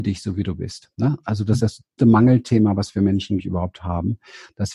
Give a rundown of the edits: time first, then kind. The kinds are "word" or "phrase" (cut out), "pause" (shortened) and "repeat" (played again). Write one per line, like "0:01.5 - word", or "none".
0:01.6 - word
0:02.0 - word
0:03.4 - word